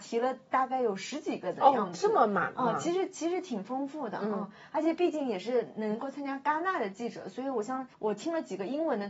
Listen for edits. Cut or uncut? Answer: cut